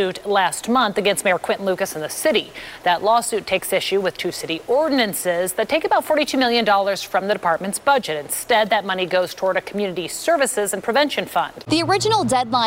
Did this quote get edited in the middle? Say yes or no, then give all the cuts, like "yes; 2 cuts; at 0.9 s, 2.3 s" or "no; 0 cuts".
no; 0 cuts